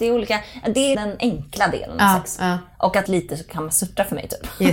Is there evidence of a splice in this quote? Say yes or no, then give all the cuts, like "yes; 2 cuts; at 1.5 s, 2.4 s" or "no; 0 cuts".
yes; 2 cuts; at 0.9 s, 3.1 s